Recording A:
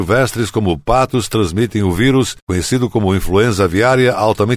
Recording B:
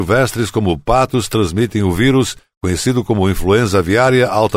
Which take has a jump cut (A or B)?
A